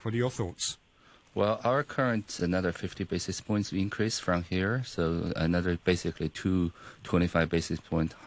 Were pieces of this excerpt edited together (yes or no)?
yes